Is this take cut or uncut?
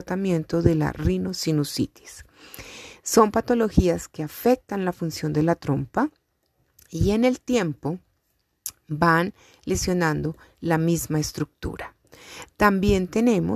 uncut